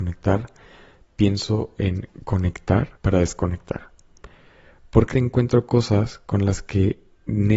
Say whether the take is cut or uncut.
cut